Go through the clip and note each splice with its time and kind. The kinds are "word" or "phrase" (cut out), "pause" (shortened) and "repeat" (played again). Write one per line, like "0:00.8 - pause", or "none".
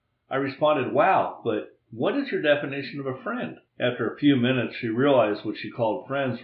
0:03.7 - pause